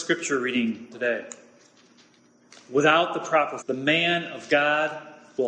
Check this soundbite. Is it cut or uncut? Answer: cut